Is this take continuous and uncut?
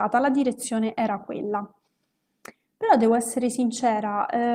yes; 0 cuts

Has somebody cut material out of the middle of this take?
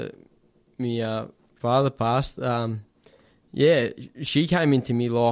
no; 0 cuts

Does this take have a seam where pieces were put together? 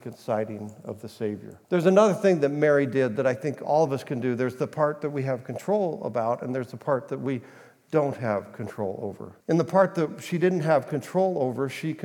yes; 2 cuts; at 1.6 s, 9.4 s

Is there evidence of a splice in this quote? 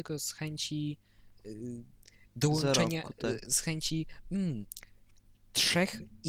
no; 0 cuts

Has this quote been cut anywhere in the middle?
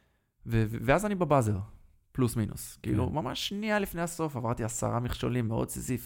no; 0 cuts

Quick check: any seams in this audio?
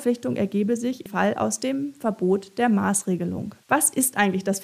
yes; 2 cuts; at 1.1 s, 3.6 s

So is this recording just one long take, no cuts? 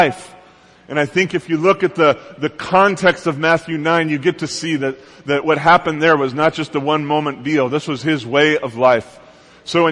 yes; 0 cuts

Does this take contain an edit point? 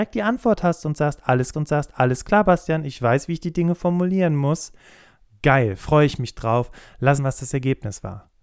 yes; 2 cuts; at 1.5 s, 7.2 s

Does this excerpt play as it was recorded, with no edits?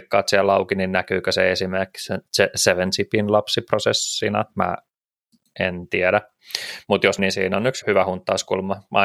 no; 2 cuts; at 7.2 s, 7.8 s

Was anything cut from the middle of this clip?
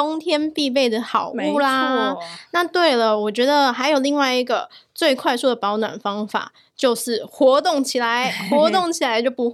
no; 0 cuts

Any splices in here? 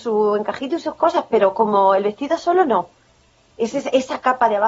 no; 0 cuts

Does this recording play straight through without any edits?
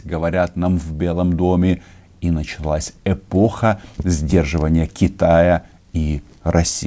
yes; 0 cuts

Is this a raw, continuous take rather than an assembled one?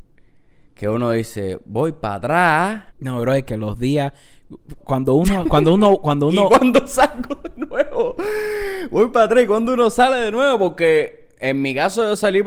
no; 2 cuts; at 2.9 s, 4.8 s

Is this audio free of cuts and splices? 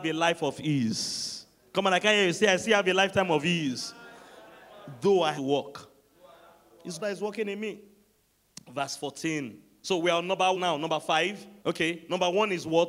no; 4 cuts; at 5.4 s, 7.0 s, 10.5 s, 11.6 s

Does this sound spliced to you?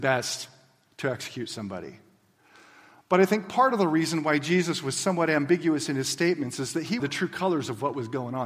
yes; 1 cut; at 7.0 s

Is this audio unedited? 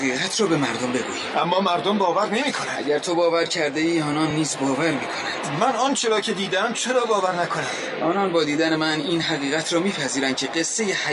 yes; 0 cuts

